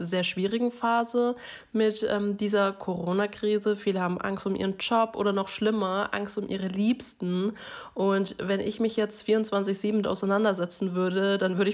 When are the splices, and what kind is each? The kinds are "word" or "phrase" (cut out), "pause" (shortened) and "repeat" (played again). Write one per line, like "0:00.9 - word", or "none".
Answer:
0:10.0 - word